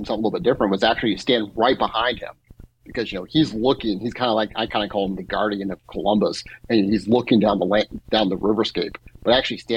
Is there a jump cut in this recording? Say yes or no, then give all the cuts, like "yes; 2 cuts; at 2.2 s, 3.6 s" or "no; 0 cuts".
no; 0 cuts